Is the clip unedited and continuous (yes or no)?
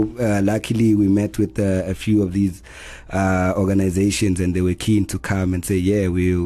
yes